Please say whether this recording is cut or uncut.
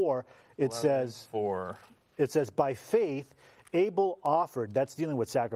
uncut